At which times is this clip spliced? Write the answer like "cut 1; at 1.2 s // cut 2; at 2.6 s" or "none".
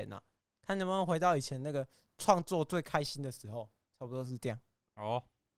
none